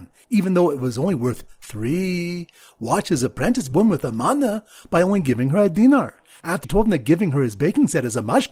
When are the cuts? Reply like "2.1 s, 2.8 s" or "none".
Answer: 3.7 s, 6.6 s